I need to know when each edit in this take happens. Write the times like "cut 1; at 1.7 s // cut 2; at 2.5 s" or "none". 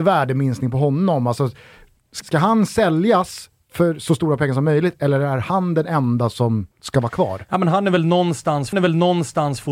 cut 1; at 2.2 s // cut 2; at 6.7 s // cut 3; at 8.7 s